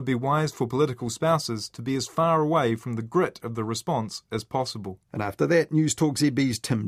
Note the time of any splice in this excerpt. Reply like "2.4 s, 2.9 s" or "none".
5.0 s